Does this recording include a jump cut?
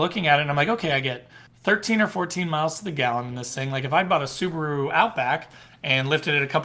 yes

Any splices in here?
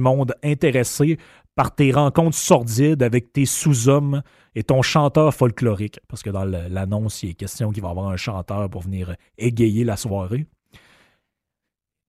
no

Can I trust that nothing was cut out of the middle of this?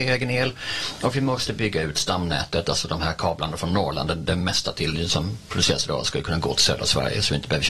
yes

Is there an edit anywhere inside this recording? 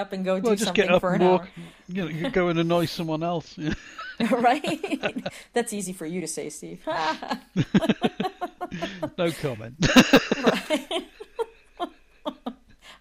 no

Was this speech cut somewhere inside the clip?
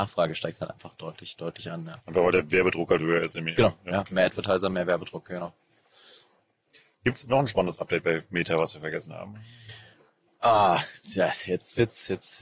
yes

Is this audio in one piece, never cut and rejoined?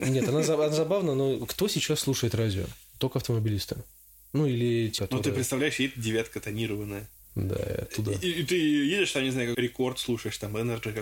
no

